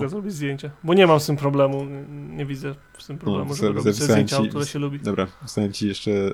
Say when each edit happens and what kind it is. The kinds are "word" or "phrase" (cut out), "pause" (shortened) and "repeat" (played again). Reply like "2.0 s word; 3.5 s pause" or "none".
none